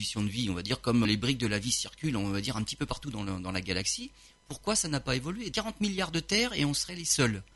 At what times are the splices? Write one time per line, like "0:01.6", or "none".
0:01.0
0:05.5